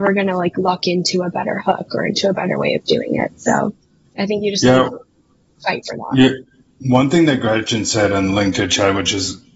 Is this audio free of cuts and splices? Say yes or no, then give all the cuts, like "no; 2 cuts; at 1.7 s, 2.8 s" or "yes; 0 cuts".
yes; 0 cuts